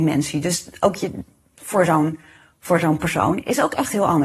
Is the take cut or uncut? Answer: cut